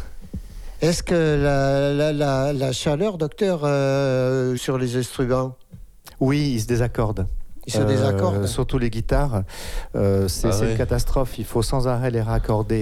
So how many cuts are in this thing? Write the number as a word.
two